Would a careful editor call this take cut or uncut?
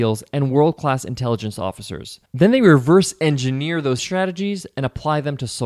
cut